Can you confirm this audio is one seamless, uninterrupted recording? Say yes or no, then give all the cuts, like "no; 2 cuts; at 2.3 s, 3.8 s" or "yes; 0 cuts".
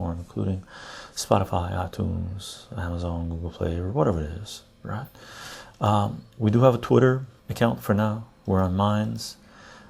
no; 1 cut; at 7.4 s